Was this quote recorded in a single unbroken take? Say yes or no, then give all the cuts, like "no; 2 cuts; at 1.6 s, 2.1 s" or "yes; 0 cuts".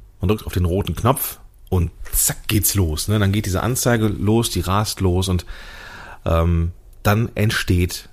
yes; 0 cuts